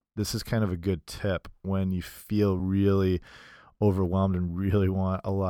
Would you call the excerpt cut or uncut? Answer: uncut